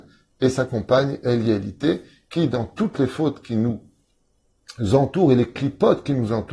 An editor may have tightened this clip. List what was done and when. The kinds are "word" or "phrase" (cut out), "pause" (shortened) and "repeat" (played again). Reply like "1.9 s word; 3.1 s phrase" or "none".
none